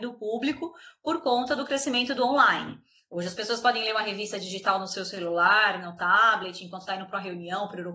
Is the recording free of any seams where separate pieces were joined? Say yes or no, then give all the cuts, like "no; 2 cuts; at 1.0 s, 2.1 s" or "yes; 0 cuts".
yes; 0 cuts